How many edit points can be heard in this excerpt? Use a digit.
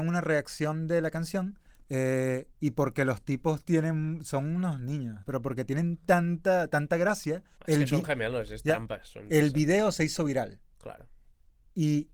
3